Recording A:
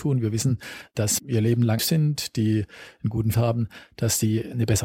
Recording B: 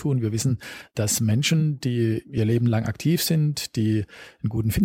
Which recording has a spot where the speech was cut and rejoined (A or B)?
A